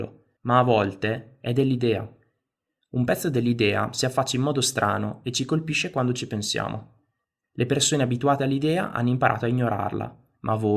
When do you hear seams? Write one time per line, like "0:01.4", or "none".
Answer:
none